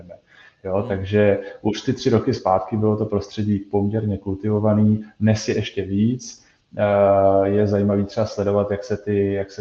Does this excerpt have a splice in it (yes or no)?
no